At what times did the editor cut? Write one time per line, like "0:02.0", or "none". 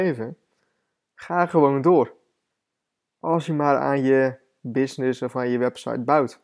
none